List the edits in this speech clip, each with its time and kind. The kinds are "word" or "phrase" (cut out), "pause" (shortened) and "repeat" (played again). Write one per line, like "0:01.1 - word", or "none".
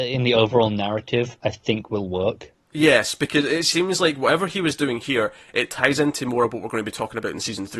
0:02.6 - pause